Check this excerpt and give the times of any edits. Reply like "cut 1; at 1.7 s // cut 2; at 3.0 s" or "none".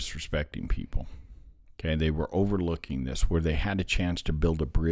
none